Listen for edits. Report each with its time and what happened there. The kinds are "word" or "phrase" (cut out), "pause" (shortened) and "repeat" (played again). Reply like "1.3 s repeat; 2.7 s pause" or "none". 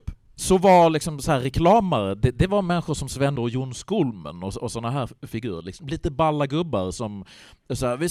3.4 s word

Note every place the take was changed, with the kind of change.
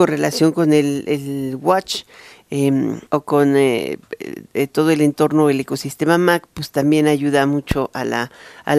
3.1 s pause

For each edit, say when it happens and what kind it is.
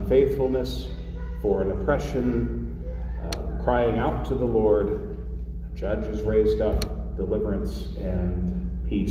none

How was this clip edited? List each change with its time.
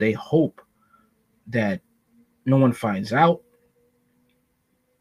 none

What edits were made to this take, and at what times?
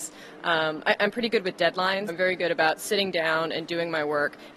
2.1 s word

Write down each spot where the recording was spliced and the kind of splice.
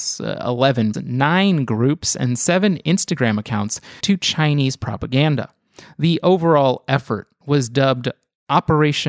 0.9 s word; 4.0 s word

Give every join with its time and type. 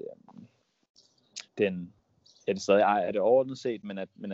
1.5 s pause

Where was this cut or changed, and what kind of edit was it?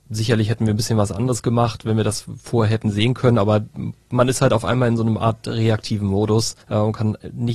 6.6 s pause

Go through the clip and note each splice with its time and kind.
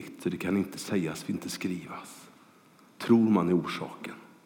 1.3 s phrase

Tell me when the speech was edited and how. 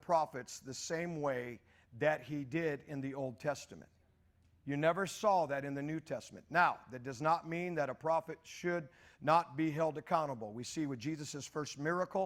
none

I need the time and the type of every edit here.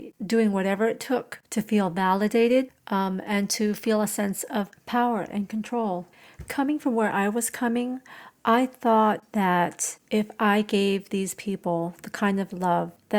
none

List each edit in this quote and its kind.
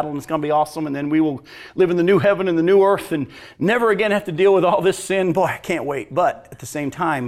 none

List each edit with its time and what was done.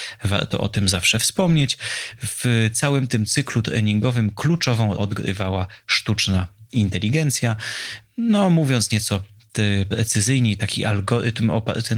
5.0 s word

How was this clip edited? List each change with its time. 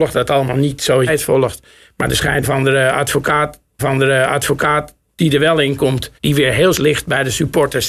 1.1 s word; 2.4 s word; 3.8 s repeat; 6.2 s pause; 6.7 s word

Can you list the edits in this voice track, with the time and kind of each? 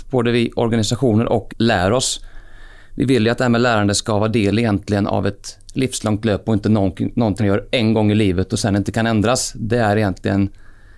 1.5 s word; 7.4 s word

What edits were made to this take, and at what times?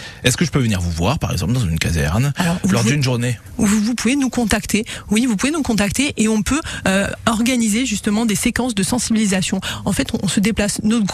none

